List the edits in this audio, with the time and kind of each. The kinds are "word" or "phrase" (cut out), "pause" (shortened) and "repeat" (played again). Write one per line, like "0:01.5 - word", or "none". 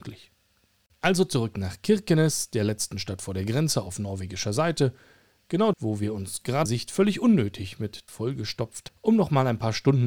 0:05.7 - word
0:06.6 - phrase
0:08.1 - word
0:08.9 - word